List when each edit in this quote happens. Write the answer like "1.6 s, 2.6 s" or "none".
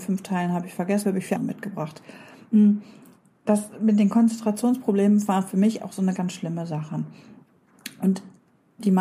1.0 s, 1.3 s, 5.8 s, 6.1 s